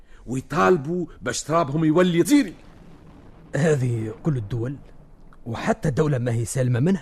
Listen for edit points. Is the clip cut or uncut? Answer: cut